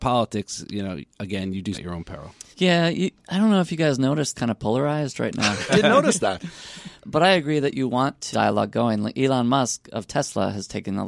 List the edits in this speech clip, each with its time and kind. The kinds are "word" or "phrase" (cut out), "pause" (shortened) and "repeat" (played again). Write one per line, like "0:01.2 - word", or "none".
0:01.7 - word
0:02.5 - pause
0:04.3 - phrase
0:05.7 - word
0:07.0 - word
0:08.3 - phrase